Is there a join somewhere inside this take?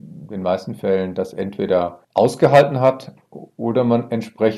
yes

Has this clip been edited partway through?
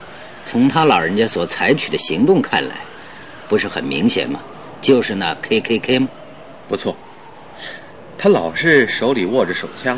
no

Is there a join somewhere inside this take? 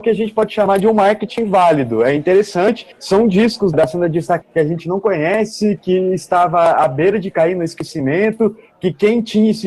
yes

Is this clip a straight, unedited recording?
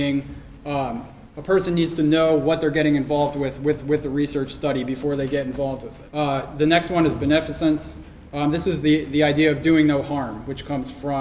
no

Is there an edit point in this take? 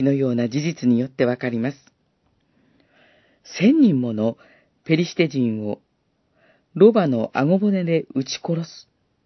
no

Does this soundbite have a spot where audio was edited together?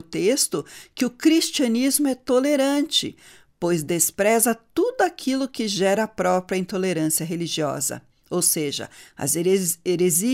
no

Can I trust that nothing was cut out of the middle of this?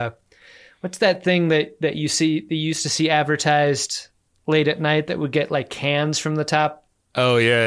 yes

